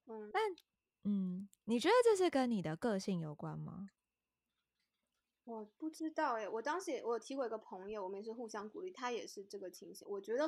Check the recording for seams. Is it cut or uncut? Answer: uncut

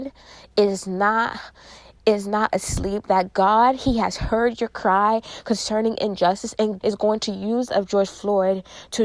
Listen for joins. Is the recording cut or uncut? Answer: cut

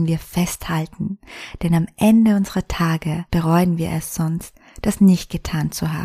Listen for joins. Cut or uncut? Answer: cut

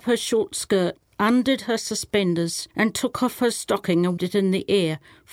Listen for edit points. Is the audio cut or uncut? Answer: cut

